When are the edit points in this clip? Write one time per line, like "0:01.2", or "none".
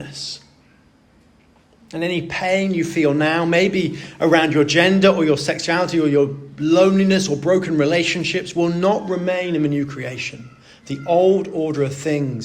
none